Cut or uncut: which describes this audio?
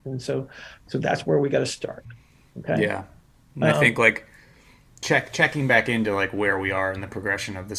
uncut